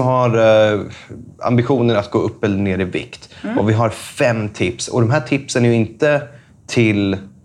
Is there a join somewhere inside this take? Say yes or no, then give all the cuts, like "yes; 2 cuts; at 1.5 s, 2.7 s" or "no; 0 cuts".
no; 0 cuts